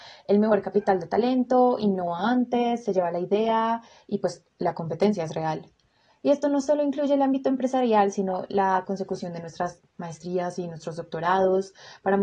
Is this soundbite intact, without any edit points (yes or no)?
yes